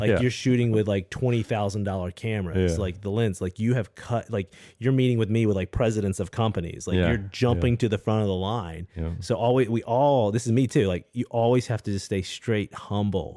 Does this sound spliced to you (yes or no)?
no